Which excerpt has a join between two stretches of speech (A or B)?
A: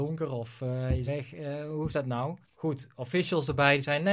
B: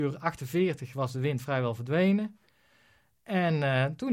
A